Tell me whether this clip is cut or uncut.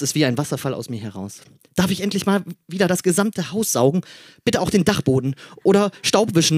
uncut